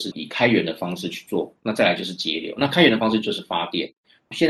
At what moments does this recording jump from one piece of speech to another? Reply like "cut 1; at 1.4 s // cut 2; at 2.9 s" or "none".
cut 1; at 1.6 s